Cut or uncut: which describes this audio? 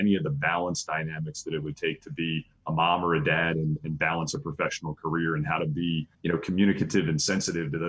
cut